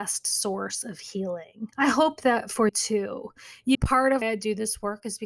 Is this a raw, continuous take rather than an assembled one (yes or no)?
no